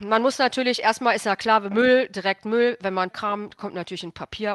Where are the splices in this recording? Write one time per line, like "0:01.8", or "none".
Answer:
0:03.1